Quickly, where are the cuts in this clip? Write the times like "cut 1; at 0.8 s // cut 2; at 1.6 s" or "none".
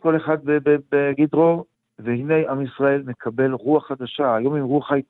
none